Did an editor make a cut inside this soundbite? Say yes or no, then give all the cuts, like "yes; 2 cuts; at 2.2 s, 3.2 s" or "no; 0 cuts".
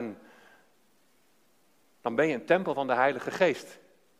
no; 0 cuts